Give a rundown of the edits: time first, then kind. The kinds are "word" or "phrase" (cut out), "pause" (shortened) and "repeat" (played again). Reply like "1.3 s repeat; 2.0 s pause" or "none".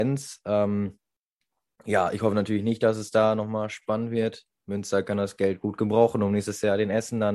none